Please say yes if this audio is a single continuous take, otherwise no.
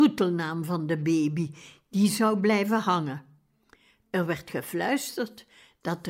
yes